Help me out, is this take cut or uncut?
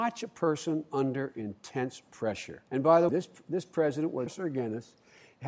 cut